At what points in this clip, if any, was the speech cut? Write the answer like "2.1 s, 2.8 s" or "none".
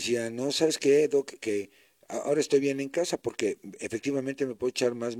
none